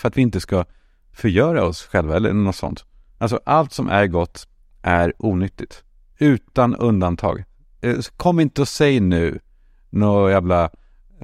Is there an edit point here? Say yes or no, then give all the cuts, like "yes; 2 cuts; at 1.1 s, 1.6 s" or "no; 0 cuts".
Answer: no; 0 cuts